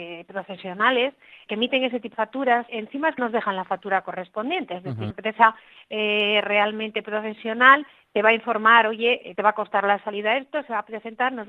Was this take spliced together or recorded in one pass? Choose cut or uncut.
cut